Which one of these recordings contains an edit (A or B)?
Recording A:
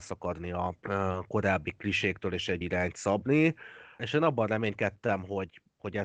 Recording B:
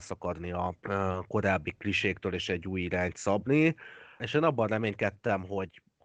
A